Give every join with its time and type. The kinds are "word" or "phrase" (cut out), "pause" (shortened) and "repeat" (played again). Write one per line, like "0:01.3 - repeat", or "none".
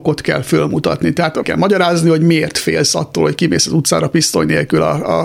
0:01.4 - word